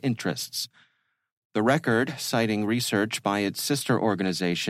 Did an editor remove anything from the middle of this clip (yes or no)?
no